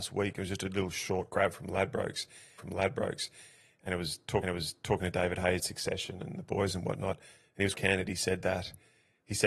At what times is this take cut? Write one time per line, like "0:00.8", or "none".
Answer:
0:02.6
0:04.4
0:05.6
0:07.7